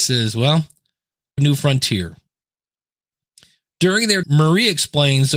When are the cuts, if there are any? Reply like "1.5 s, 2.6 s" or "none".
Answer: 1.4 s, 4.2 s